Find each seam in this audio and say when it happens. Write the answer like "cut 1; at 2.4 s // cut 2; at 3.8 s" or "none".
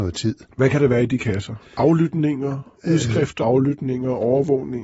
cut 1; at 3.4 s